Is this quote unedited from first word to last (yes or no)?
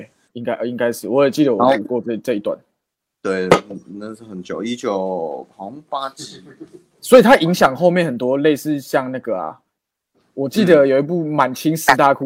yes